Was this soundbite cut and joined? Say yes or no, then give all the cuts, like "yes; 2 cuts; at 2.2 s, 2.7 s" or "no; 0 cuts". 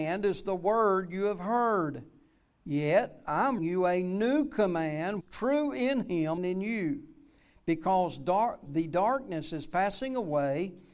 yes; 4 cuts; at 3.6 s, 5.2 s, 6.4 s, 8.7 s